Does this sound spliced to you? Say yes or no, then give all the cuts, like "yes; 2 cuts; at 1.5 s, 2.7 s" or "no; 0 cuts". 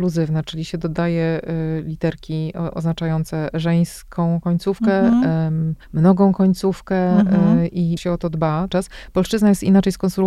yes; 3 cuts; at 5.8 s, 8.0 s, 8.7 s